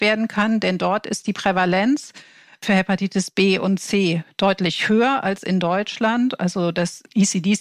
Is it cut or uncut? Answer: uncut